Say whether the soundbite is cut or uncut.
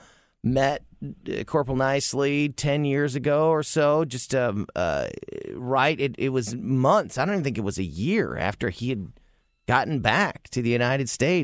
uncut